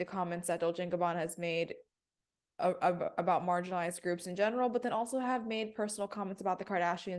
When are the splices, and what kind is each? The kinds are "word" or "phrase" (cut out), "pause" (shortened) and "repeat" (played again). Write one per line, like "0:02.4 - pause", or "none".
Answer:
none